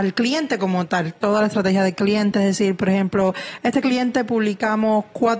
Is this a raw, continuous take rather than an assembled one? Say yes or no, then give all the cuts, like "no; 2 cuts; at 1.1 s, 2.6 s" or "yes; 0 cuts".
yes; 0 cuts